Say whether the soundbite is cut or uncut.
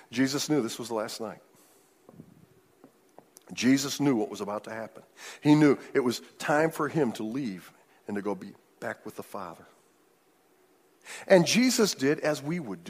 uncut